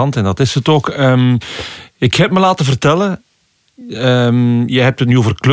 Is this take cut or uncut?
uncut